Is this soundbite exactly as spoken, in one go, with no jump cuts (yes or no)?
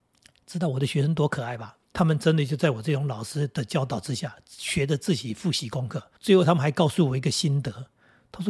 no